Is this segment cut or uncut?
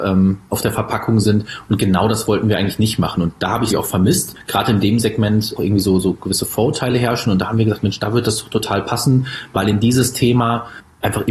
cut